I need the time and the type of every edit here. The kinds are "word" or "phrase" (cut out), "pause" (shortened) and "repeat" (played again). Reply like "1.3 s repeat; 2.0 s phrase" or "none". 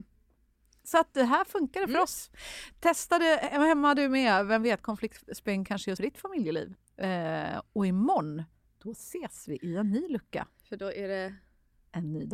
6.0 s word

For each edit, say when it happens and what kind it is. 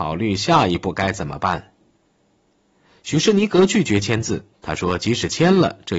none

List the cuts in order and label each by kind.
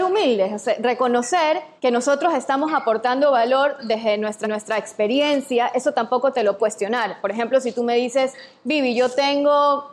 1.8 s pause; 4.4 s repeat; 6.6 s word

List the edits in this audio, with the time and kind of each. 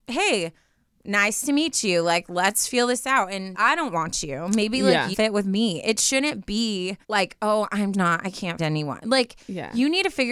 3.5 s word; 5.1 s word; 7.0 s pause; 7.9 s word; 8.6 s word

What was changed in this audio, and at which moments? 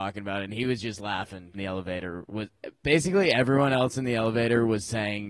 1.5 s phrase

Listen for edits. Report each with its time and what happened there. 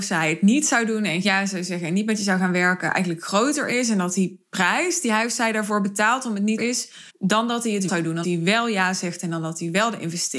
1.2 s word; 6.6 s phrase; 7.1 s pause; 7.9 s word; 8.2 s word

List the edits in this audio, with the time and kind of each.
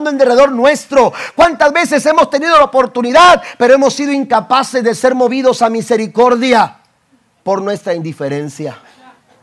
none

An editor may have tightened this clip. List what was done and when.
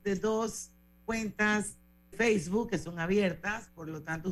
2.1 s word

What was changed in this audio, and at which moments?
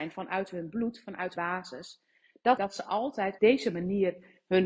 1.3 s word; 2.6 s phrase; 3.4 s phrase

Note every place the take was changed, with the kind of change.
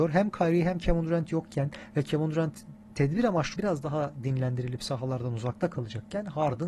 3.5 s word

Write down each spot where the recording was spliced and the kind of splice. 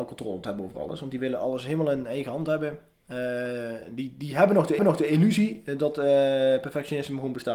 4.8 s repeat

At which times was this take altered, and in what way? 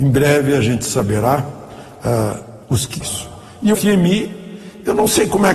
2.6 s pause; 3.0 s word; 3.7 s word

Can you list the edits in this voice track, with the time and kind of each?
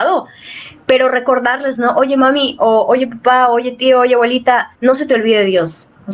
4.8 s pause

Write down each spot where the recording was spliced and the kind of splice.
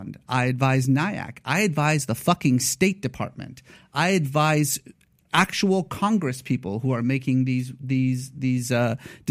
none

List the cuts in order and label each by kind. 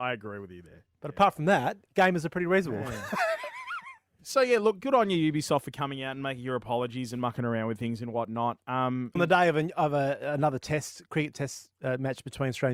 9.2 s word

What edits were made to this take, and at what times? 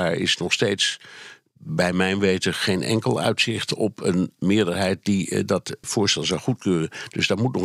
5.8 s word

